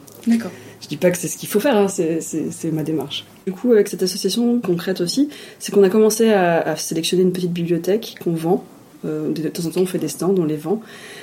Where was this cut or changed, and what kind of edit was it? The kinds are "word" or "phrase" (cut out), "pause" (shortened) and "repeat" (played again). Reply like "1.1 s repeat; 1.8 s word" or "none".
4.6 s phrase